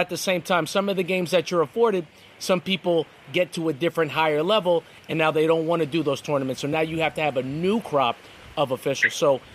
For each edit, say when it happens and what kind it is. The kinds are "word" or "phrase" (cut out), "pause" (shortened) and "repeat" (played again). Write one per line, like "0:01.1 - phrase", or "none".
none